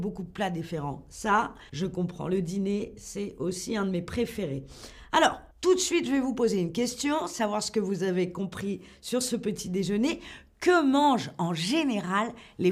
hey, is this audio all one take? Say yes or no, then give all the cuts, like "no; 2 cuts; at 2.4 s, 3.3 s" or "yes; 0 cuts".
no; 2 cuts; at 1.7 s, 5.5 s